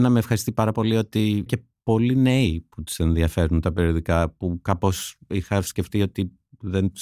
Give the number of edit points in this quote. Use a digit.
1